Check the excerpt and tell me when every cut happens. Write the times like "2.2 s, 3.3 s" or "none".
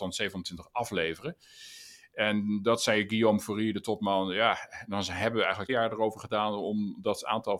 5.7 s